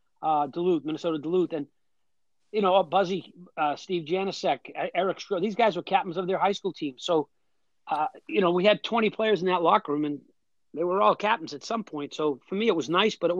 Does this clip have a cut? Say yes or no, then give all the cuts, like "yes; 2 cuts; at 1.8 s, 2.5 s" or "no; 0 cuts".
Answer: no; 0 cuts